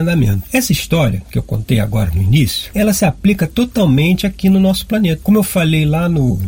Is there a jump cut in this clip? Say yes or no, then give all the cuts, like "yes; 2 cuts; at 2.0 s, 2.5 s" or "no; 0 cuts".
no; 0 cuts